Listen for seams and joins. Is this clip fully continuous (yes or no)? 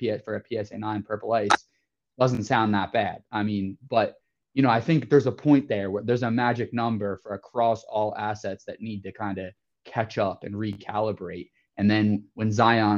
yes